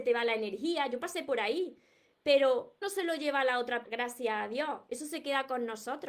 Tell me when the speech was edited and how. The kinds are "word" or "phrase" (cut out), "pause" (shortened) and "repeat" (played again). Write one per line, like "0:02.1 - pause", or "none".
0:02.8 - word
0:03.8 - word